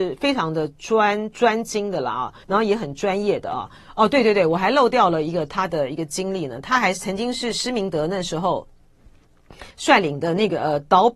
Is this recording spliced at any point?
yes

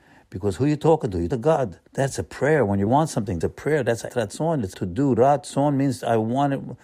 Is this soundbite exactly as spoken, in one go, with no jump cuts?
no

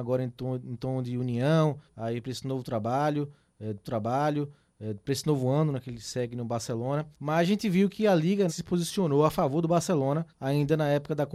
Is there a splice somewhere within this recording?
yes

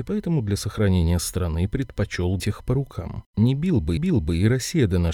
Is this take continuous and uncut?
no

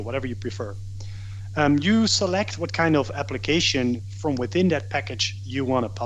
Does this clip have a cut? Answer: no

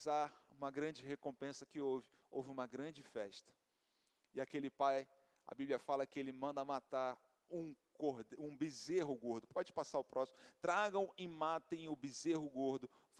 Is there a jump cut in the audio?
no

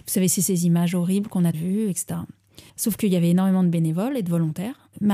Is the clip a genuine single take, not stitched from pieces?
no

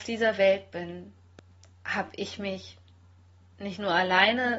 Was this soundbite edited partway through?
no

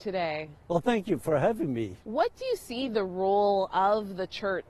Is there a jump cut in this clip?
yes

